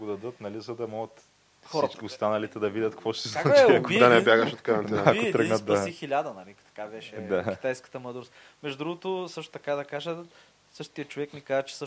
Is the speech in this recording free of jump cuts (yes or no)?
yes